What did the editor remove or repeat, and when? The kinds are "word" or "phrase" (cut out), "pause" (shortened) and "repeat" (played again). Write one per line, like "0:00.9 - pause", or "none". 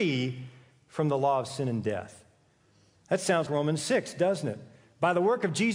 0:03.5 - word